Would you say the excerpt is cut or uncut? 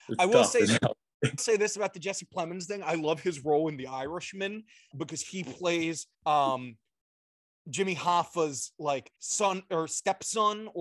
cut